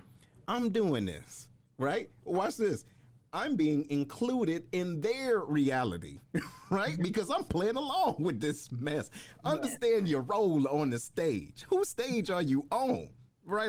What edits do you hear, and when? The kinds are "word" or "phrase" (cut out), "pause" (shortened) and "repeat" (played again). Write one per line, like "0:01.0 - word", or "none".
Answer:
none